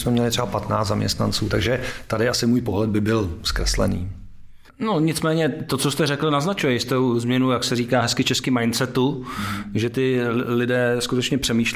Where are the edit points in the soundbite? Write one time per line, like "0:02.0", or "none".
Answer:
0:04.7